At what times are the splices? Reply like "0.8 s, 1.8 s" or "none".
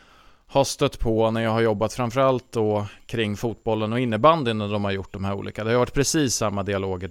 none